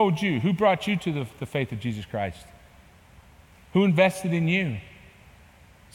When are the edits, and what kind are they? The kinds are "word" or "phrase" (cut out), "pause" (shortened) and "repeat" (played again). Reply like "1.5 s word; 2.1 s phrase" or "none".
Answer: none